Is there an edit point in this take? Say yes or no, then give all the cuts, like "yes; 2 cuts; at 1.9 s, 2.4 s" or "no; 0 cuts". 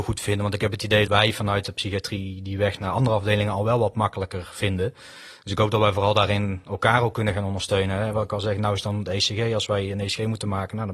yes; 1 cut; at 1.1 s